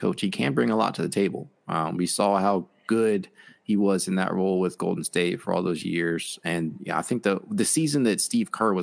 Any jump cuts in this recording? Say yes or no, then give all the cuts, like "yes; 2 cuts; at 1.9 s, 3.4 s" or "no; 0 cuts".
no; 0 cuts